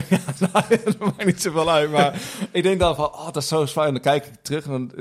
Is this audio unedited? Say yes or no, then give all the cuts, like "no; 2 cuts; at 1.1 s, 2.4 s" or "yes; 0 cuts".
yes; 0 cuts